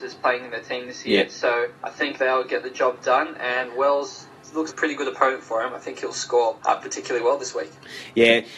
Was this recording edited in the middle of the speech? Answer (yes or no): yes